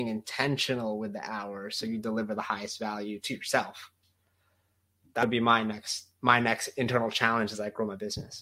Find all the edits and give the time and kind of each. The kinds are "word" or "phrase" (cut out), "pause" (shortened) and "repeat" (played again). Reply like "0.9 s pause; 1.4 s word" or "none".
none